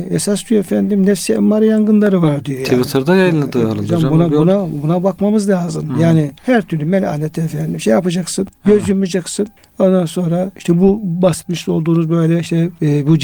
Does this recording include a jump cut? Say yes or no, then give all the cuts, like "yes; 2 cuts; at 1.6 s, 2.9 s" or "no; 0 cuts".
yes; 3 cuts; at 6.4 s, 8.6 s, 9.6 s